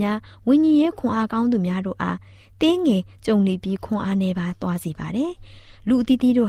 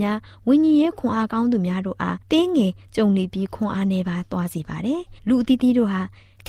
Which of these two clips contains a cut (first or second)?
second